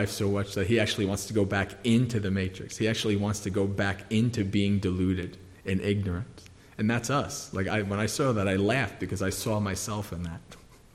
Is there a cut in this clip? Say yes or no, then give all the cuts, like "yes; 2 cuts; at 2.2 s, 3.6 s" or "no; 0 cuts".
no; 0 cuts